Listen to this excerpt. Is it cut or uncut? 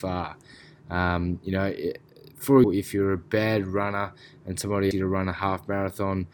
cut